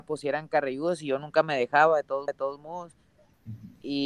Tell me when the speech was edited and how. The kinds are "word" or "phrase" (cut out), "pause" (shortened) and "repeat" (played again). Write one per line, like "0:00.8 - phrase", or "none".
0:02.3 - repeat